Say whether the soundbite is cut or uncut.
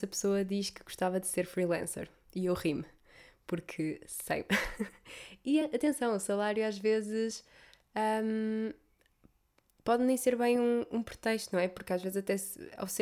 uncut